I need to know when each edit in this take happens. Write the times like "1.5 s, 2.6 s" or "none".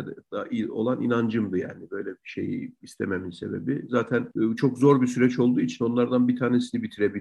none